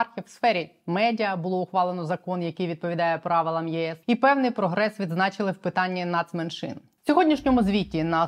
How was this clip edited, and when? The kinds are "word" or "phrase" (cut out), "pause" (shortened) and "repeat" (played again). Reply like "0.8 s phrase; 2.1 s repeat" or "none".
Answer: 4.0 s pause